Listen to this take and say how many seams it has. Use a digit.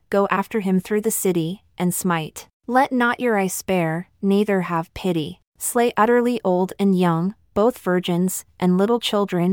2